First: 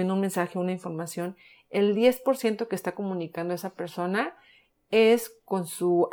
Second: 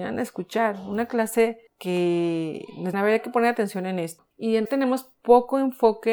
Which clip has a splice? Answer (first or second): second